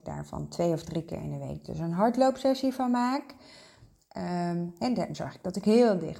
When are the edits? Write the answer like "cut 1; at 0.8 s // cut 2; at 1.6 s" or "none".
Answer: cut 1; at 5.1 s